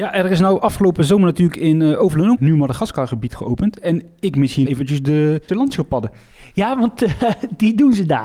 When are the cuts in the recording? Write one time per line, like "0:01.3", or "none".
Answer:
0:02.4
0:04.6
0:05.5